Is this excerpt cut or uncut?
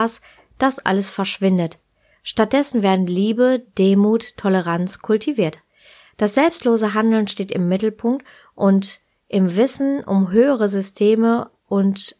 uncut